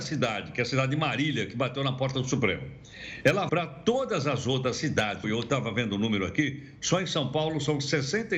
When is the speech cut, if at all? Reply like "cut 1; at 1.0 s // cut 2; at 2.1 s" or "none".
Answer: cut 1; at 3.5 s // cut 2; at 5.2 s